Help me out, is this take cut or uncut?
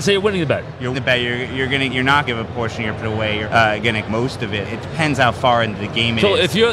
cut